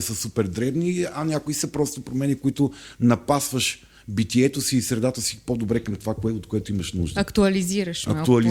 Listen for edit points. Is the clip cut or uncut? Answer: uncut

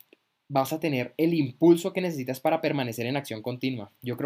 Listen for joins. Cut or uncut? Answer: uncut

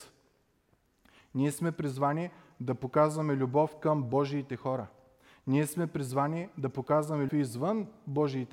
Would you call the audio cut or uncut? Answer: cut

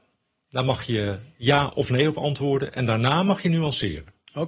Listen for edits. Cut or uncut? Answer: uncut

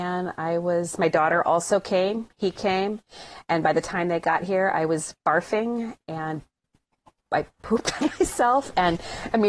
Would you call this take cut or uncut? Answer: uncut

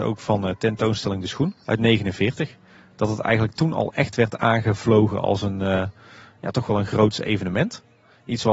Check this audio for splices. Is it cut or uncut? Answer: cut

